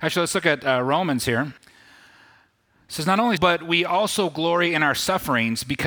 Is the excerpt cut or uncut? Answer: cut